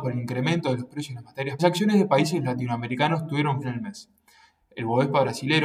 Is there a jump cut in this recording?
yes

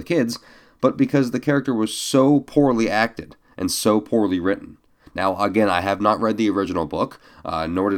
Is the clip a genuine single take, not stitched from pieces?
yes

